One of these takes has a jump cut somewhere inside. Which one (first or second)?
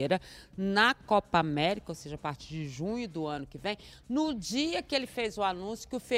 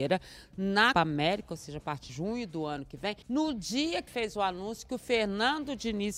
second